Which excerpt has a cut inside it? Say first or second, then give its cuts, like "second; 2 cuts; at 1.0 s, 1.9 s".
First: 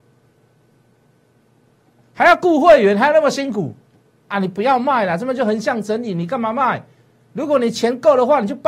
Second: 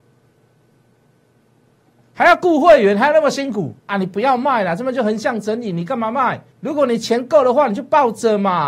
second; 2 cuts; at 3.8 s, 6.5 s